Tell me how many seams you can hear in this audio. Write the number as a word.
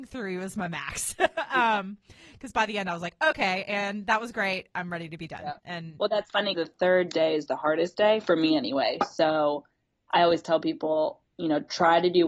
one